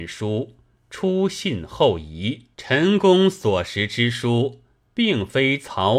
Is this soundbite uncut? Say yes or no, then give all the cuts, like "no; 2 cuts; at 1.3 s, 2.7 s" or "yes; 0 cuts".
no; 1 cut; at 2.5 s